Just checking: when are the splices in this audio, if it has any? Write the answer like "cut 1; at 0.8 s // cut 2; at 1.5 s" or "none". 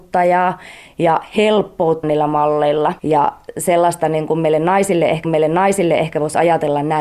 cut 1; at 2.0 s // cut 2; at 3.0 s // cut 3; at 5.2 s